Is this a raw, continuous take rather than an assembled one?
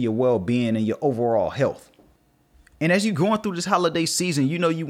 yes; 0 cuts

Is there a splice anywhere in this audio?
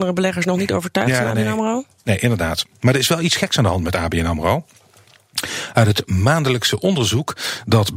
no; 0 cuts

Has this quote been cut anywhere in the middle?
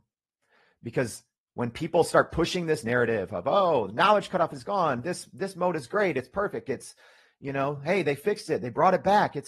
no; 0 cuts

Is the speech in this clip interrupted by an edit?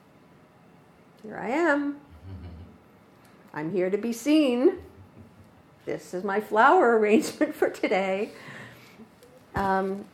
no; 0 cuts

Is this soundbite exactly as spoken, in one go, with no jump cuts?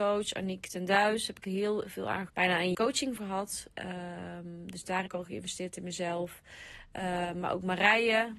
no; 5 cuts; at 1.4 s, 2.3 s, 2.7 s, 3.2 s, 5.1 s

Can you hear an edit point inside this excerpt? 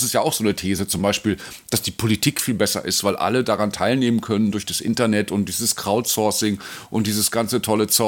no; 0 cuts

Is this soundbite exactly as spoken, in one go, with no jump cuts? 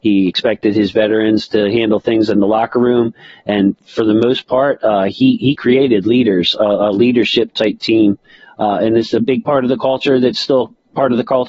yes; 0 cuts

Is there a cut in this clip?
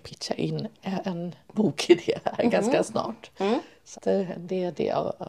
yes; 2 cuts; at 1.5 s, 3.9 s

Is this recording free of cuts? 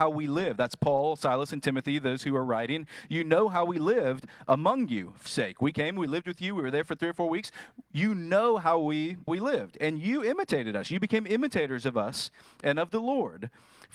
no; 2 cuts; at 5.3 s, 9.3 s

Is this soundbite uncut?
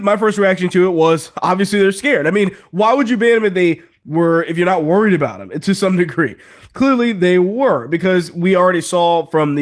yes; 0 cuts

